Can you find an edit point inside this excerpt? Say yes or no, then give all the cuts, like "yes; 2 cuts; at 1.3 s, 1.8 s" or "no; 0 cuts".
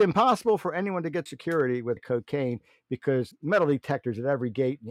yes; 3 cuts; at 1.3 s, 2.0 s, 3.3 s